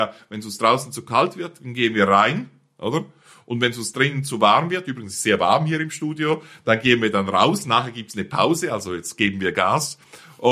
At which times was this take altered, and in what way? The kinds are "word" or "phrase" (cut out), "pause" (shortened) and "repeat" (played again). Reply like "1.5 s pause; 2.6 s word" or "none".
none